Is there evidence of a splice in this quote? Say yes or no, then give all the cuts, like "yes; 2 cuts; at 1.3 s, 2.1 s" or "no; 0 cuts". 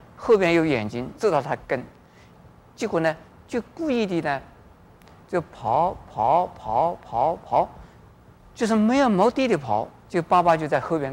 yes; 2 cuts; at 1.2 s, 10.0 s